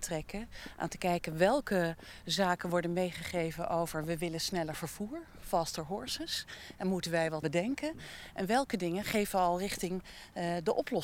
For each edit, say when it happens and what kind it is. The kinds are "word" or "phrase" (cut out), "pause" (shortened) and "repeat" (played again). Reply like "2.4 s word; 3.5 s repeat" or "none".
7.4 s word